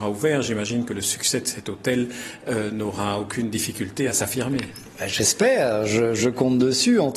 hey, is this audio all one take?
yes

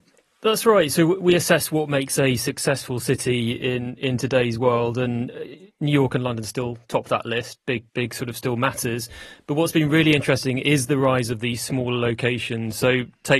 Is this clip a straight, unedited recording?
no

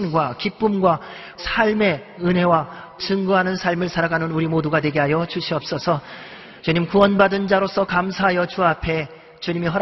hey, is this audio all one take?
no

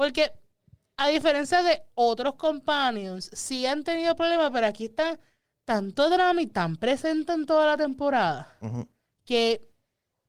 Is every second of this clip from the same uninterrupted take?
yes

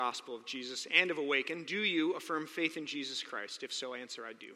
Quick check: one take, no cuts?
yes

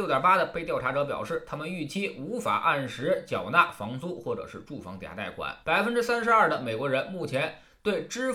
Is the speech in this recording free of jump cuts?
no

